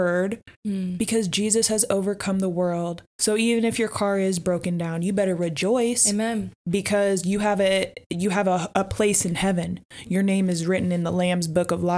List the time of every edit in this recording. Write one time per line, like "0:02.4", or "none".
0:03.1